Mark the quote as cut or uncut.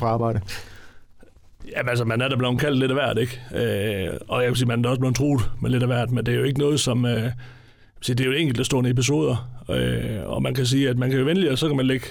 uncut